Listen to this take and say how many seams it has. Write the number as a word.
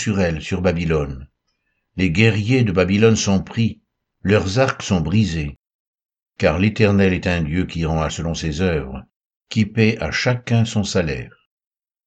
one